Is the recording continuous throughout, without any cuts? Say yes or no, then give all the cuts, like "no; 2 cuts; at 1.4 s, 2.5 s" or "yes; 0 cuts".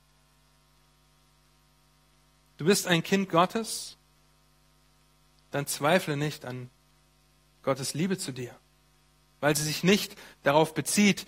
yes; 0 cuts